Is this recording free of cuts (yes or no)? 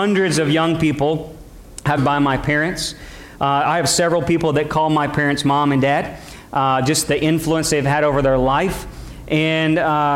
no